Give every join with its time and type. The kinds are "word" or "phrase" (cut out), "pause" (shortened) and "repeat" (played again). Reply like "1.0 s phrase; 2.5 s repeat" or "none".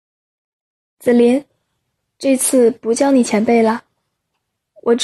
none

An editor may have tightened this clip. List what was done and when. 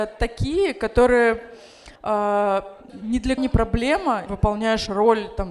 2.0 s pause; 2.9 s phrase; 3.4 s word; 4.3 s phrase

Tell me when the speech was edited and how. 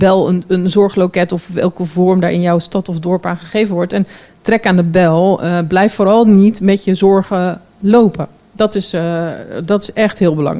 none

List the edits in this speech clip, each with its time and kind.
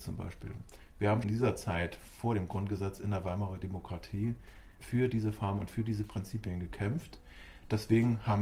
1.2 s word; 4.8 s word

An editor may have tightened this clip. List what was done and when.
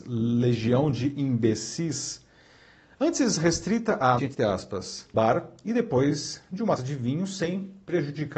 4.2 s word; 5.1 s word; 6.8 s word

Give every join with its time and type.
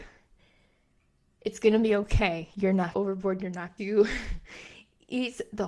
2.9 s phrase; 3.8 s word

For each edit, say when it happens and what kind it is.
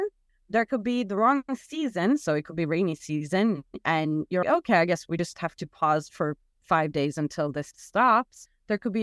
4.4 s word

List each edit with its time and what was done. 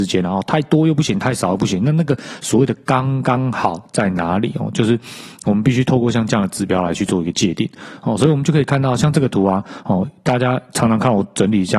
none

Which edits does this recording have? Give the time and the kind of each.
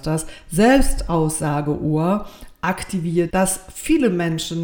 3.3 s word

